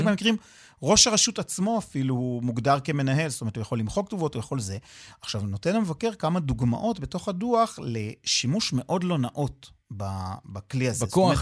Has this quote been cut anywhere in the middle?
no; 0 cuts

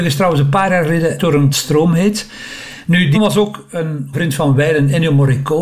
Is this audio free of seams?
no; 4 cuts; at 1.2 s, 1.5 s, 3.1 s, 4.1 s

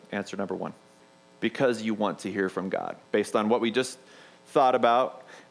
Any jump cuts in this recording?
yes; 2 cuts; at 1.0 s, 3.1 s

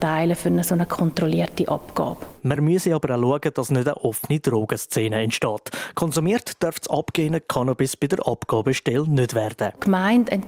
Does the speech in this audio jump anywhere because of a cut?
no; 0 cuts

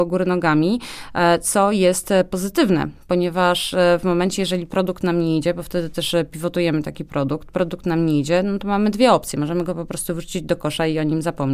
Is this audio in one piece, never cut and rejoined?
yes; 0 cuts

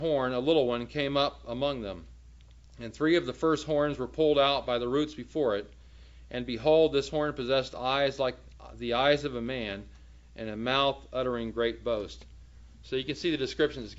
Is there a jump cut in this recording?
no; 0 cuts

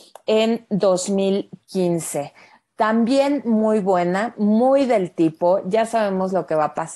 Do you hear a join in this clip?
no; 0 cuts

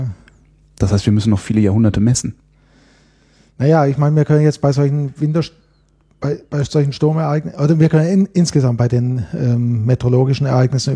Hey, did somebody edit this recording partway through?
no; 0 cuts

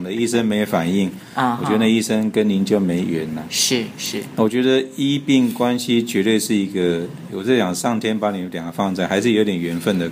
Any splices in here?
no; 0 cuts

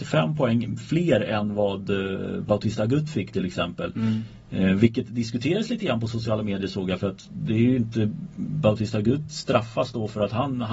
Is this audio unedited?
yes; 0 cuts

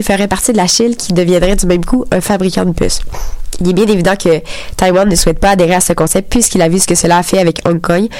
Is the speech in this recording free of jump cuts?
yes; 0 cuts

